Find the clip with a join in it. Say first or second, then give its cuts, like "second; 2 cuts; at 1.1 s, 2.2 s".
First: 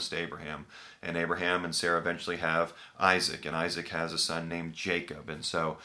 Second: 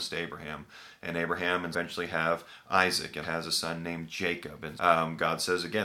second; 3 cuts; at 1.7 s, 3.2 s, 4.8 s